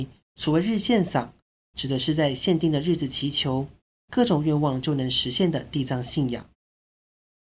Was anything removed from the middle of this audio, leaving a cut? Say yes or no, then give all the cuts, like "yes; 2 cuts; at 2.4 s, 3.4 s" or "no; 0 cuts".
no; 0 cuts